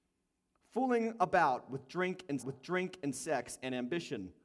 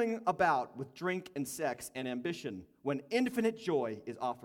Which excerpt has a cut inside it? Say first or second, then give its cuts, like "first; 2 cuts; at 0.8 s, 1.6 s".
first; 1 cut; at 2.4 s